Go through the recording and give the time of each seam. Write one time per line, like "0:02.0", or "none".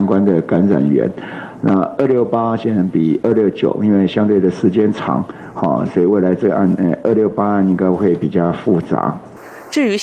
none